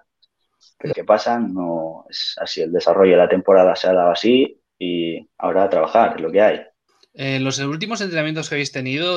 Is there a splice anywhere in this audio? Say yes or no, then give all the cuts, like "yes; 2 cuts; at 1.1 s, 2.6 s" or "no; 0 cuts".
yes; 3 cuts; at 0.9 s, 5.3 s, 6.9 s